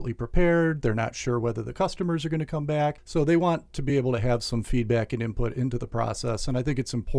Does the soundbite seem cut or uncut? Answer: uncut